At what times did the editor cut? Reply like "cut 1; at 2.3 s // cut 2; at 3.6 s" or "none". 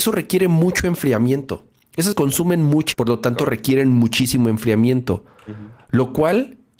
cut 1; at 2.1 s // cut 2; at 2.9 s